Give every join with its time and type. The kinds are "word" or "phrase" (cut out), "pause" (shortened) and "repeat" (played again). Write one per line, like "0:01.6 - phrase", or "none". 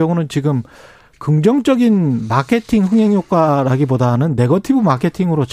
none